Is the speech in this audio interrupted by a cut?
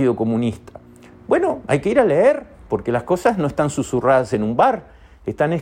no; 0 cuts

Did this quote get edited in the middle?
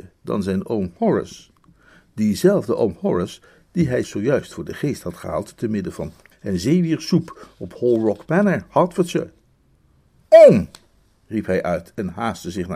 yes; 2 cuts; at 4.0 s, 6.3 s

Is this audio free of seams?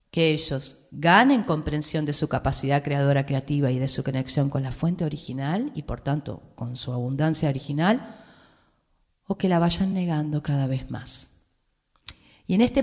yes; 0 cuts

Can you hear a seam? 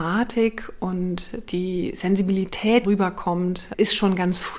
yes; 1 cut; at 2.8 s

